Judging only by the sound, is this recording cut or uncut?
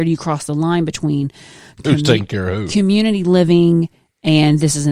uncut